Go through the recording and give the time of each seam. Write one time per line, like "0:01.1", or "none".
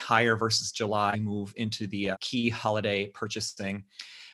0:01.1
0:02.1